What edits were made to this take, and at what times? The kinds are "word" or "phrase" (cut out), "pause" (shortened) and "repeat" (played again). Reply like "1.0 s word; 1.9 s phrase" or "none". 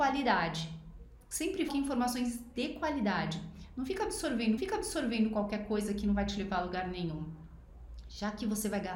1.7 s word; 4.6 s repeat